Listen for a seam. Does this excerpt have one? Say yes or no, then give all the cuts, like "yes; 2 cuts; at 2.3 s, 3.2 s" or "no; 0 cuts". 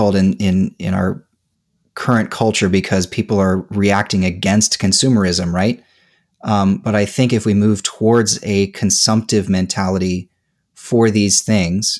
no; 0 cuts